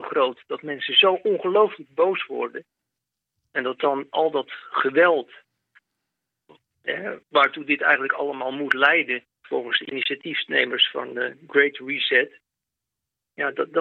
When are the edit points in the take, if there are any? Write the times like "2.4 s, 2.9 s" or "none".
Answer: 7.2 s, 9.3 s